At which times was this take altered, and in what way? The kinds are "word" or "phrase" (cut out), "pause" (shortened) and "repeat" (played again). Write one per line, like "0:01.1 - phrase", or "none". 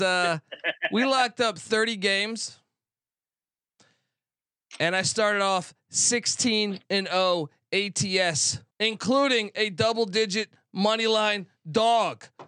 0:08.7 - pause